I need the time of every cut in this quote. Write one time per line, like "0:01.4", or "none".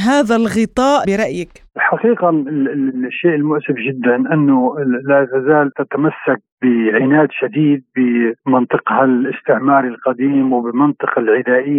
0:01.0
0:05.7